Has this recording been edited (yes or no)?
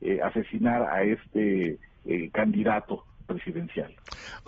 no